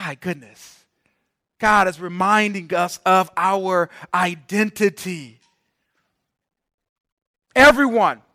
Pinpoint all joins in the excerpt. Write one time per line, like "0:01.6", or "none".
none